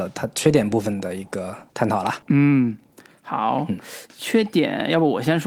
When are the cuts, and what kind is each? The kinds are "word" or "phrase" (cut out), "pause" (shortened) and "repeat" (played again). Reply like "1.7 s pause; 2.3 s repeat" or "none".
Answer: 1.7 s pause; 2.2 s pause